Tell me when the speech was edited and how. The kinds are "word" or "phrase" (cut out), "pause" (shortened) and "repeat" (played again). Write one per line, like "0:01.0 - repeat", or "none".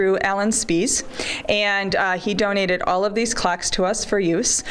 none